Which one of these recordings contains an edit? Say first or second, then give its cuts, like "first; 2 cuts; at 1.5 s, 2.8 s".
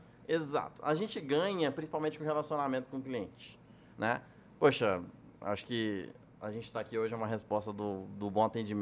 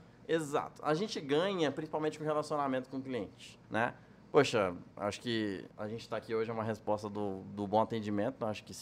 second; 3 cuts; at 3.6 s, 4.9 s, 5.7 s